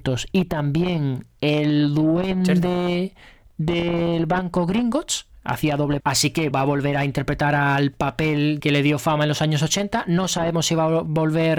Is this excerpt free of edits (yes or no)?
no